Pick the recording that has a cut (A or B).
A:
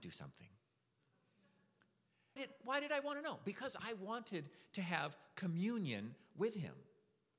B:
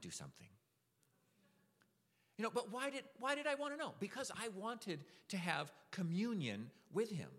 A